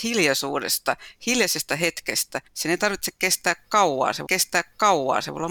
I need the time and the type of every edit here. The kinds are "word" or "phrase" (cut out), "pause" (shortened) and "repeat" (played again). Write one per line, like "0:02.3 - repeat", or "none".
0:02.5 - pause
0:04.3 - repeat